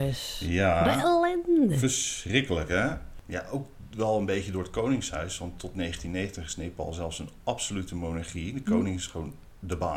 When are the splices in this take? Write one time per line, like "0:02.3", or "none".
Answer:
none